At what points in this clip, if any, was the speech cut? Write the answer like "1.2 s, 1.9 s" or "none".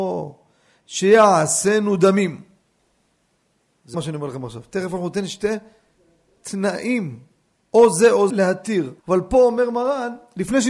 3.9 s, 8.3 s, 9.0 s